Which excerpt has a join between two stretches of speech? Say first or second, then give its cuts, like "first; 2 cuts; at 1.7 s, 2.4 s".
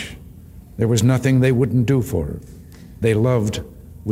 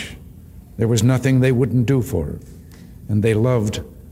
first; 1 cut; at 3.0 s